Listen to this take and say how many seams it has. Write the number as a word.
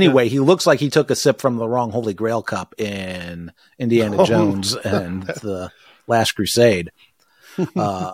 zero